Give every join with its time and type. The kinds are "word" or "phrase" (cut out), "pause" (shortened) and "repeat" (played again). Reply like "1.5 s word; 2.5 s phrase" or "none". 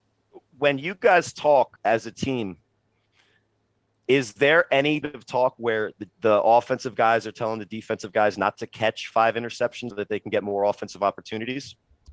1.8 s pause; 5.0 s word; 6.1 s pause; 9.9 s word